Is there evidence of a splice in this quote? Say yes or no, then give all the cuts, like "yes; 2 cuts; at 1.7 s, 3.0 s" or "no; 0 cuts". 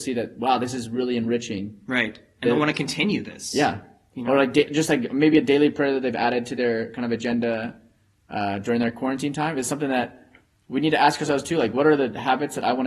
no; 0 cuts